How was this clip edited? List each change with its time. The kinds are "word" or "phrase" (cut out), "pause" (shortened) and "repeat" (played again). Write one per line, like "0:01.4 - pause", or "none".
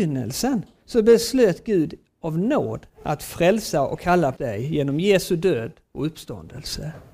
0:02.9 - pause
0:04.4 - word